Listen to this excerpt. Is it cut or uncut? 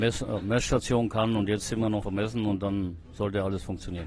cut